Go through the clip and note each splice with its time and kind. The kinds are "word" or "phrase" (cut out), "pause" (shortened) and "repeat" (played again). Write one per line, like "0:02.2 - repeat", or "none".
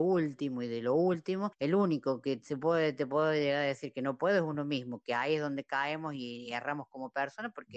none